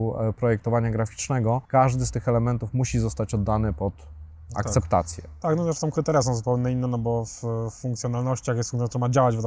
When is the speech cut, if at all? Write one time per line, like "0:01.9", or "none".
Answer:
0:01.6